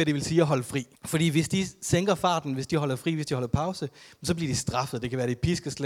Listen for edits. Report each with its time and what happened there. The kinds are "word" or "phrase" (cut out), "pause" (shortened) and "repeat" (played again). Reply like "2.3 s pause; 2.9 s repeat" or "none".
0.9 s pause